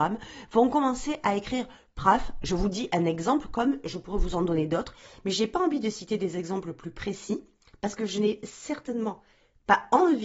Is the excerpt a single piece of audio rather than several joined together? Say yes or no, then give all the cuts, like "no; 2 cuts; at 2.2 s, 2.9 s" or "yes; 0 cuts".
yes; 0 cuts